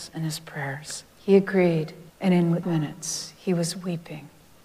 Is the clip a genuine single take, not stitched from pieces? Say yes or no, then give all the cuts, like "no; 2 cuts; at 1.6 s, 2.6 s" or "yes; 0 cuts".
no; 3 cuts; at 1.1 s, 2.1 s, 2.6 s